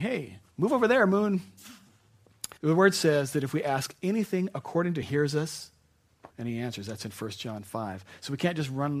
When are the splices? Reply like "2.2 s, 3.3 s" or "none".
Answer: 2.6 s, 5.0 s, 6.3 s